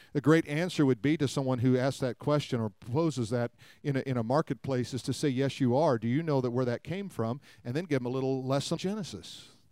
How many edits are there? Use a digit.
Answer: 1